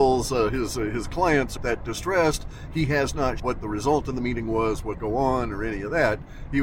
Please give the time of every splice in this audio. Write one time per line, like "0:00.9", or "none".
0:01.6
0:03.4
0:04.9

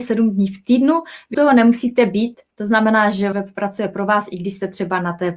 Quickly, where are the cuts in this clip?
0:01.3
0:02.5
0:03.3

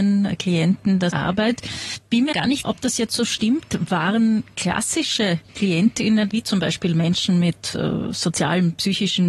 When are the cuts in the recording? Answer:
0:01.1
0:02.3
0:02.6
0:05.5
0:06.3

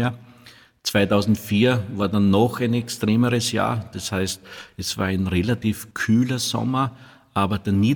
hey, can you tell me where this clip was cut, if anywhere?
0:05.9

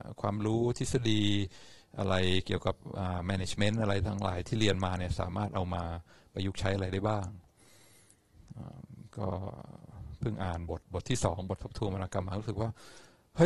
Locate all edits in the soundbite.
none

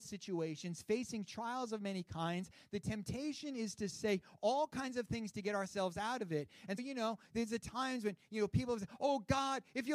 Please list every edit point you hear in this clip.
0:06.8

